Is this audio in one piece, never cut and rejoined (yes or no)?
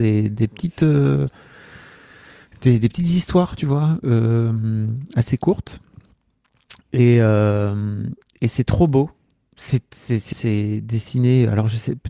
no